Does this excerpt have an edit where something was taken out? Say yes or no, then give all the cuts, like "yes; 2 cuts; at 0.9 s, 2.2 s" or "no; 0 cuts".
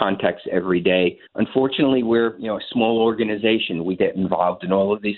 yes; 2 cuts; at 1.3 s, 4.0 s